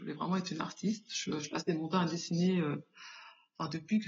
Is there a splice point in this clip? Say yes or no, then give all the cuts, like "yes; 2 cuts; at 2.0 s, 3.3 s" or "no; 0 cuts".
no; 0 cuts